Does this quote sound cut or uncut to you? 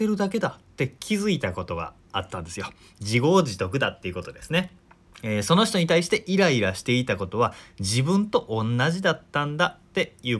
uncut